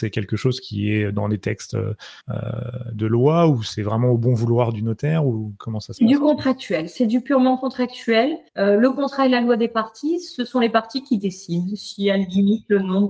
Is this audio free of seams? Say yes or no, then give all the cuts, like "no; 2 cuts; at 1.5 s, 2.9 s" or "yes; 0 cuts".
no; 2 cuts; at 2.2 s, 8.5 s